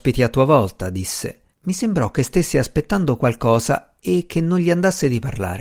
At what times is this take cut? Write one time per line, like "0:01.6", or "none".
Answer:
0:01.5